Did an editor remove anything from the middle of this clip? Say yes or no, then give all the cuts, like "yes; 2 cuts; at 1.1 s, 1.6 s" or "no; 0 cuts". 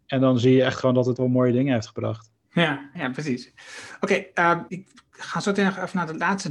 yes; 3 cuts; at 1.2 s, 2.9 s, 4.7 s